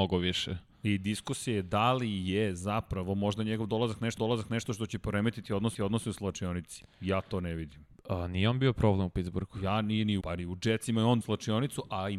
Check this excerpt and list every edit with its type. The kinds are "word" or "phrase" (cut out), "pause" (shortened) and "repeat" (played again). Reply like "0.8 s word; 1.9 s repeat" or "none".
4.2 s repeat; 5.7 s repeat; 10.2 s word; 11.2 s word